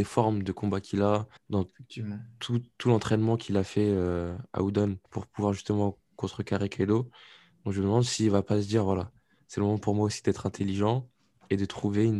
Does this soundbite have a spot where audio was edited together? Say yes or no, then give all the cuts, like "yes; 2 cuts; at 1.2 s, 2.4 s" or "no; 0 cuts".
yes; 2 cuts; at 1.4 s, 5.1 s